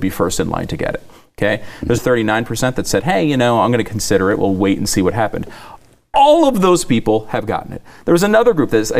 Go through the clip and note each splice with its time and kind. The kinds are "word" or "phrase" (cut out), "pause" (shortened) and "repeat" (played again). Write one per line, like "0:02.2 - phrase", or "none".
0:02.0 - word